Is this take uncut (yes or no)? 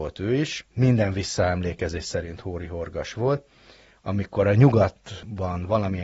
yes